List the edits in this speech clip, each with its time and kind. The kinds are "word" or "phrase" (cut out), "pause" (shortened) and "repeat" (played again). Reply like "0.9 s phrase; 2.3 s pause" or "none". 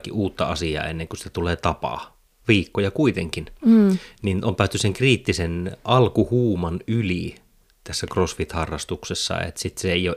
none